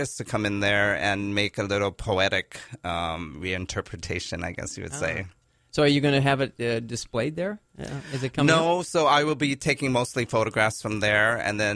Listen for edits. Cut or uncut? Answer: uncut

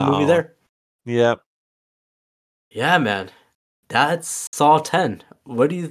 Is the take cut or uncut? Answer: uncut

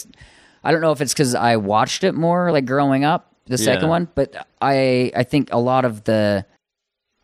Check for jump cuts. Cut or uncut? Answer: uncut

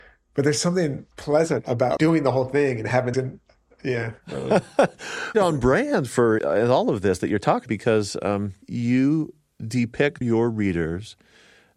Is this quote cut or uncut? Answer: cut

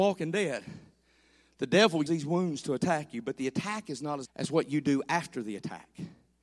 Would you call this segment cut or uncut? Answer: cut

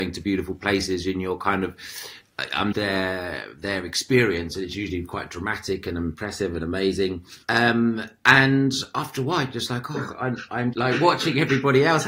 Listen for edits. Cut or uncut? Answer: cut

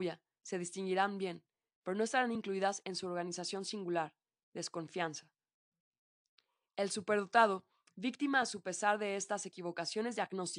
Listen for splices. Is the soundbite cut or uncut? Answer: uncut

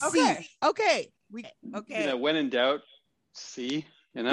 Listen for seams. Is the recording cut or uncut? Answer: cut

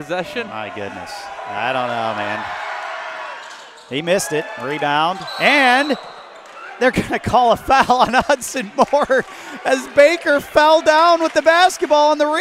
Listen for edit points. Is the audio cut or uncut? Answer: uncut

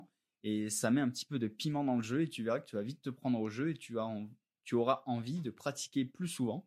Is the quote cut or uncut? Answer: uncut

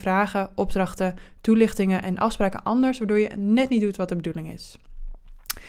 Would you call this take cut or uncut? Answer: uncut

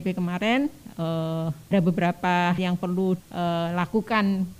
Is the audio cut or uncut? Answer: cut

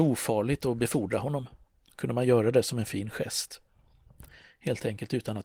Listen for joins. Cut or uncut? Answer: uncut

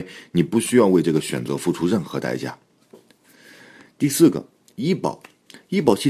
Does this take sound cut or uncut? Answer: uncut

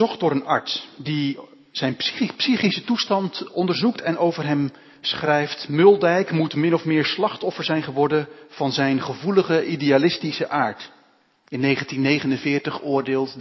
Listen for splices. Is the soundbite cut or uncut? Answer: uncut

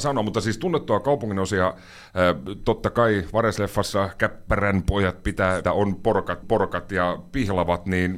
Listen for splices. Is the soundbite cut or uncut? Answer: cut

